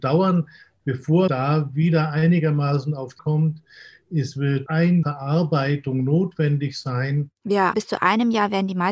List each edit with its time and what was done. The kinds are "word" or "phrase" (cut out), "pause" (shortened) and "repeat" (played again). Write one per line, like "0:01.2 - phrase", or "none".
0:01.3 - word
0:03.2 - word
0:05.0 - word
0:07.7 - word